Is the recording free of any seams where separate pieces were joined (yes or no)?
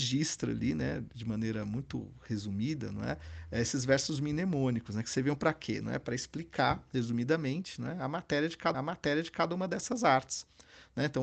no